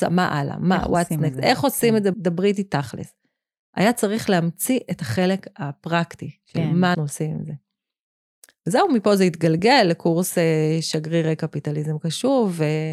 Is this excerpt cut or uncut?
cut